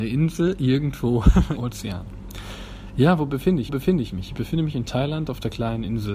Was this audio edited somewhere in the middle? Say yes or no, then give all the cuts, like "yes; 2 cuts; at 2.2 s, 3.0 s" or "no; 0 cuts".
yes; 2 cuts; at 1.6 s, 3.7 s